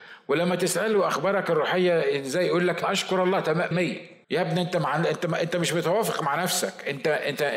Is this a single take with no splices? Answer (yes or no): no